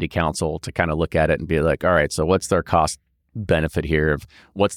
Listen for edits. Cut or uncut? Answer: uncut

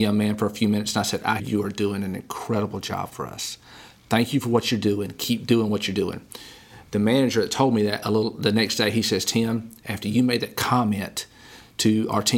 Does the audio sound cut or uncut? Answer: cut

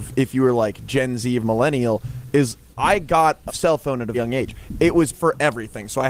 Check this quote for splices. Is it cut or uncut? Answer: cut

